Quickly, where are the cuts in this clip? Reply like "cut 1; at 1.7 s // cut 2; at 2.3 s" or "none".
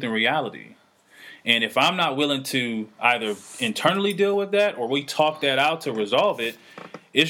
none

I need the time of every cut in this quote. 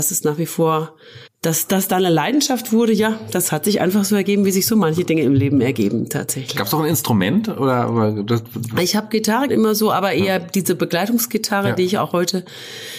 cut 1; at 1.3 s // cut 2; at 9.5 s

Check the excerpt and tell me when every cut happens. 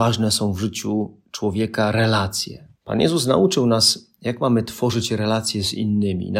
cut 1; at 2.8 s

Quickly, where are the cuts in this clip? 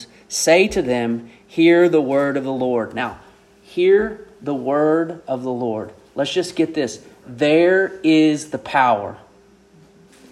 none

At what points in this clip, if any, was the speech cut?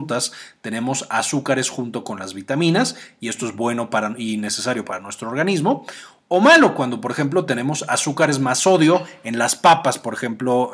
none

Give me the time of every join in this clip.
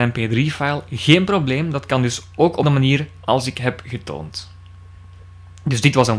cut 1; at 2.6 s

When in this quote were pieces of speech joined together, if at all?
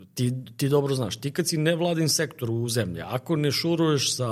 none

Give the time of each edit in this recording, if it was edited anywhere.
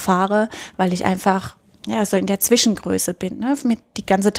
none

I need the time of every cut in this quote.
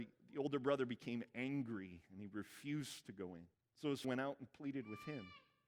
cut 1; at 3.5 s // cut 2; at 4.0 s

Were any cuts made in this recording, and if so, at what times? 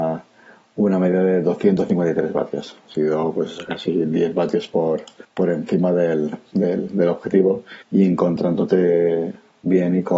cut 1; at 5.2 s // cut 2; at 7.8 s

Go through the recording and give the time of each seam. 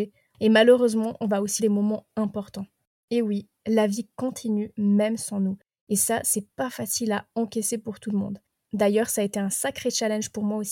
cut 1; at 1.6 s

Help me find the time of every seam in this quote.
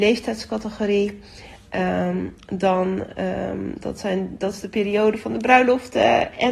none

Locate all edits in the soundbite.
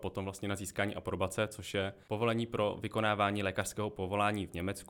cut 1; at 2.0 s

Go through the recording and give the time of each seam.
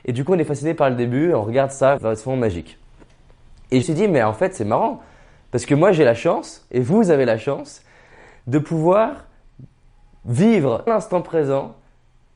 cut 1; at 2.0 s // cut 2; at 3.8 s // cut 3; at 10.9 s

